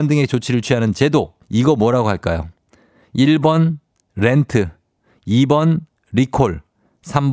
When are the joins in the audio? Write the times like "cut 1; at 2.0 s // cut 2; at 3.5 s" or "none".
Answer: cut 1; at 1.4 s